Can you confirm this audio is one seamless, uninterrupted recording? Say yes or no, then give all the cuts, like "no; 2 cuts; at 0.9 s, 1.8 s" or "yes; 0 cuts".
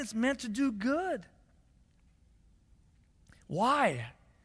yes; 0 cuts